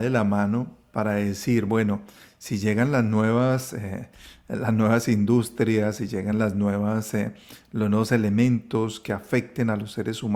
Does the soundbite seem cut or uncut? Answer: uncut